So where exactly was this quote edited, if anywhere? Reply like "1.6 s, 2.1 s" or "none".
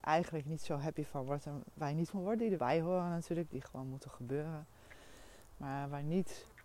2.1 s, 2.6 s